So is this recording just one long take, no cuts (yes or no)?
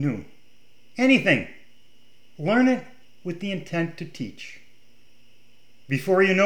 yes